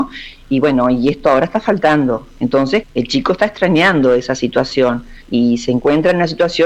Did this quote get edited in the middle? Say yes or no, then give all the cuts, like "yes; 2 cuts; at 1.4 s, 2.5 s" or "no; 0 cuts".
yes; 2 cuts; at 2.8 s, 5.2 s